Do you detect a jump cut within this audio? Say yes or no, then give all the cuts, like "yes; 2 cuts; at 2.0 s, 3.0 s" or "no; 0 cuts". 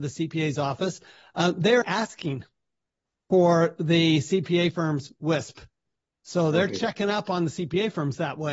yes; 1 cut; at 1.8 s